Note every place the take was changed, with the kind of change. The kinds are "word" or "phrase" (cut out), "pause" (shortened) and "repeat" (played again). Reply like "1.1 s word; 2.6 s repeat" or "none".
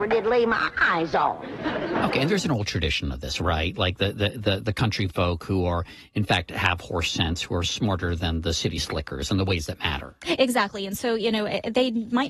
none